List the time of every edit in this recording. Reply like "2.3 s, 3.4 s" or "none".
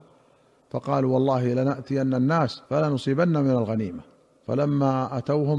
2.7 s, 4.2 s